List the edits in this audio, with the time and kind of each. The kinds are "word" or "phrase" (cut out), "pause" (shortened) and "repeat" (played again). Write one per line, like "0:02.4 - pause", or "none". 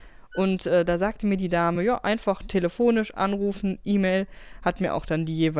none